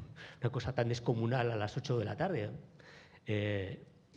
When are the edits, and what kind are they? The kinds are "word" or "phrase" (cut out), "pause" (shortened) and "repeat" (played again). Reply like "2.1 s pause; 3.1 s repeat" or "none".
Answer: none